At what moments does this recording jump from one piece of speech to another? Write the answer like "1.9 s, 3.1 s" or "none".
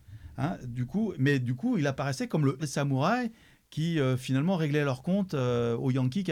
2.6 s